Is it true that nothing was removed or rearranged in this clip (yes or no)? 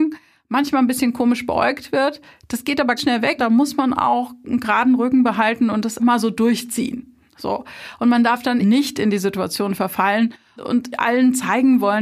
no